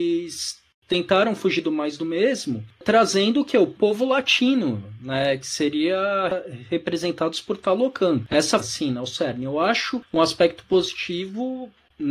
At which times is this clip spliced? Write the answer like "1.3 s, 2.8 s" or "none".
8.6 s